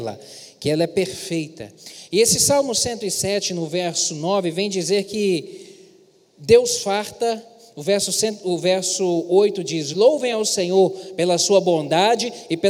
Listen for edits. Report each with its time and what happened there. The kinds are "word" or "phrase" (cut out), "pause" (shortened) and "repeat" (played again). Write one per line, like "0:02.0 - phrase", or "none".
none